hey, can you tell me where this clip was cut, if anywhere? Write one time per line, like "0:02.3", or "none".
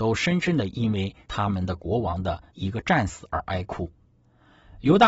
0:01.2
0:02.5

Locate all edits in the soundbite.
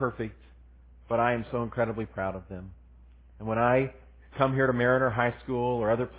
none

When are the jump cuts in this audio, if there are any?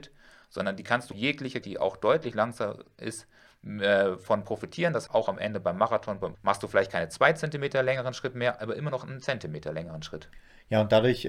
0:01.1
0:01.6
0:05.1
0:06.3

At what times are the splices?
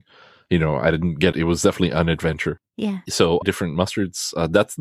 0:01.3
0:03.4

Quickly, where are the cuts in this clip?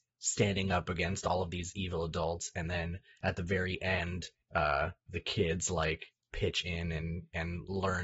none

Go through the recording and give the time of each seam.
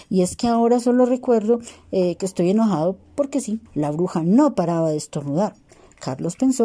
0:03.7

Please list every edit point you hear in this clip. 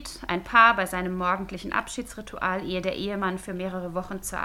none

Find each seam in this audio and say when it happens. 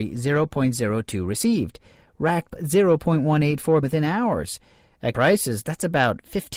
0:02.5
0:03.8
0:05.1

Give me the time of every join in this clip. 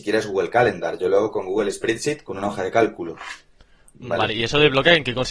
none

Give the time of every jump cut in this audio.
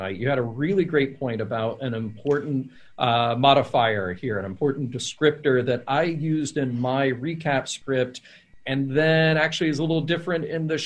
none

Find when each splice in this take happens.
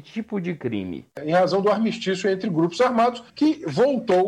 0:01.1
0:03.3

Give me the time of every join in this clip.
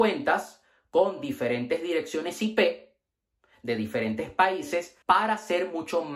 0:05.0

